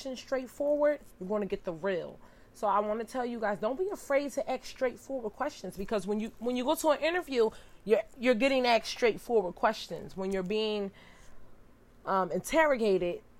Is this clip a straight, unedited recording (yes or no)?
yes